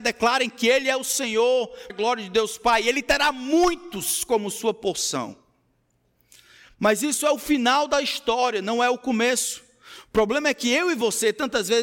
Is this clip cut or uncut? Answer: cut